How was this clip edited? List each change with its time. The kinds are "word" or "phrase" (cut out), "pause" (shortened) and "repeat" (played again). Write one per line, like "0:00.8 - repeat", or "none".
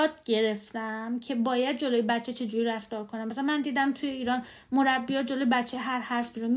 none